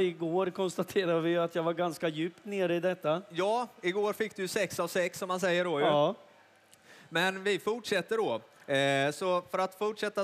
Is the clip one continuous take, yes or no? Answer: yes